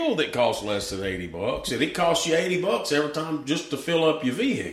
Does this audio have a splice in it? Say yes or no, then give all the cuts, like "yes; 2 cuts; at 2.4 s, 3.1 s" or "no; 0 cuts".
no; 0 cuts